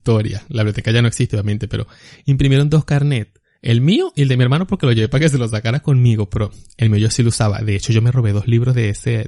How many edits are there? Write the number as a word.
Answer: zero